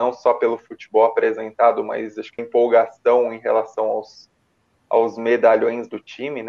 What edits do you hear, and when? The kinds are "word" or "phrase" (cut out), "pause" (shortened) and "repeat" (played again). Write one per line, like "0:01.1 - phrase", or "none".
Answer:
0:02.4 - phrase